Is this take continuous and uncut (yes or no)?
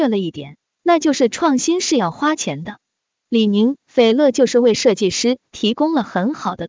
yes